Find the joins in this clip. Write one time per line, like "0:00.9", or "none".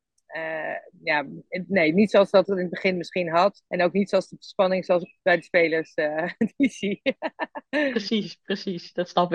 0:03.7